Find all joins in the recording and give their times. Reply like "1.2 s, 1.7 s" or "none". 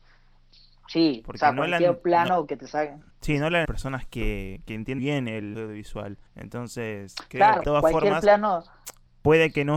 3.1 s, 3.6 s, 5.0 s, 5.5 s, 6.3 s, 7.6 s

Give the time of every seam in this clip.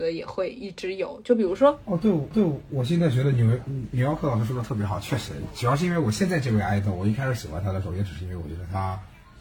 2.3 s

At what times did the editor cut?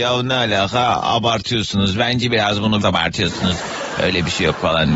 2.8 s

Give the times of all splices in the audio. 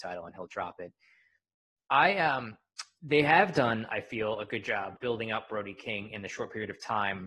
5.0 s

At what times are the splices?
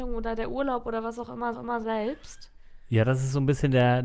1.5 s

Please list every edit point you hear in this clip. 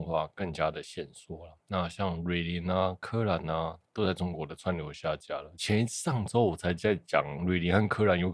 1.6 s

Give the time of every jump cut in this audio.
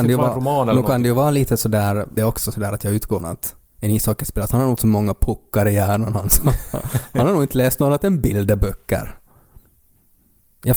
2.2 s, 3.2 s, 4.8 s

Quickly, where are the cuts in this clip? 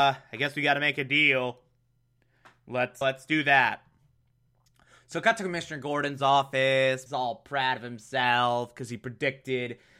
3.0 s, 7.1 s

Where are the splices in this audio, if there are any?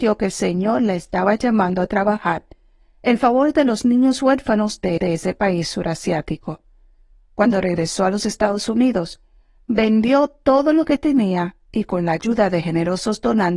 5.0 s

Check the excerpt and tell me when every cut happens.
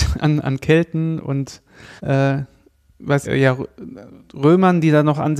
2.0 s, 3.2 s

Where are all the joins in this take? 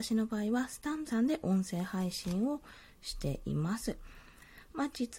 1.1 s

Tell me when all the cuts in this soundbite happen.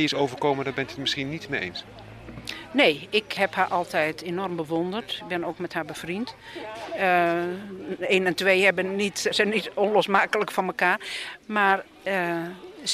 3.4 s, 9.3 s

